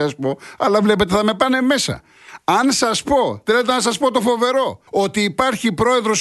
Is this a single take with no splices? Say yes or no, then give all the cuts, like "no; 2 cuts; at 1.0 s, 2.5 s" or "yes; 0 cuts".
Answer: no; 1 cut; at 4.9 s